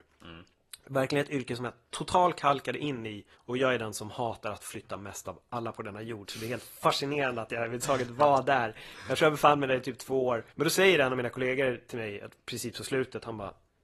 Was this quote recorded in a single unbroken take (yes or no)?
no